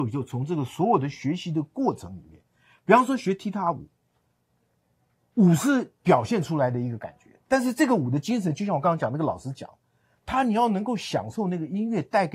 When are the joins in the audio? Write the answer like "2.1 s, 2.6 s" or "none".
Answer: none